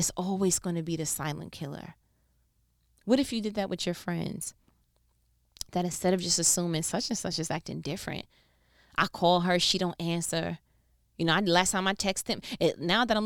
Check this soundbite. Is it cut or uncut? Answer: uncut